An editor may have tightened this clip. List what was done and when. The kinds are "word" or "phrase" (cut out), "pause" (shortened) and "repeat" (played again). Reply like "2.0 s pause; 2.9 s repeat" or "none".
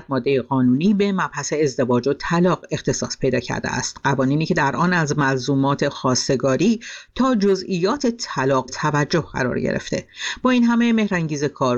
8.7 s word